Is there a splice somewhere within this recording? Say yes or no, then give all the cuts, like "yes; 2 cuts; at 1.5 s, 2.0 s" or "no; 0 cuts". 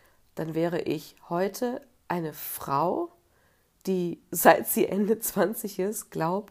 no; 0 cuts